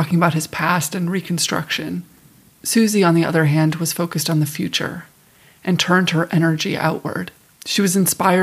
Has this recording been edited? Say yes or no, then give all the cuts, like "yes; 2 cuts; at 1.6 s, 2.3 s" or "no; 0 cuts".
no; 0 cuts